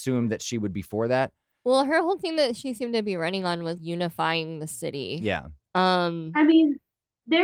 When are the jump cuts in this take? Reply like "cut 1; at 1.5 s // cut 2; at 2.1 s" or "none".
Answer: cut 1; at 3.8 s